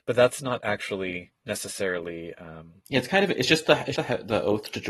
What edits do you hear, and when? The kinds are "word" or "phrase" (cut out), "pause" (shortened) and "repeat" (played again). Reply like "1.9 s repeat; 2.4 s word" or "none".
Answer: 2.8 s pause; 3.9 s word